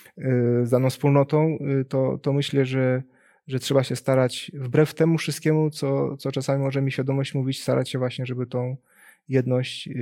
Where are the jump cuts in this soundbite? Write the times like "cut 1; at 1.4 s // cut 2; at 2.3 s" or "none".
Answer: none